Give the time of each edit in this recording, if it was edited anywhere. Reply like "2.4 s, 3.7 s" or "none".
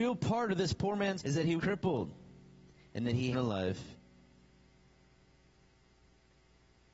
1.2 s, 1.6 s, 2.7 s, 3.3 s